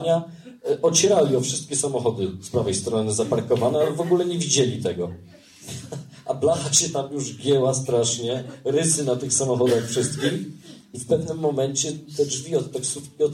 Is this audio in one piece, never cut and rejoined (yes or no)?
yes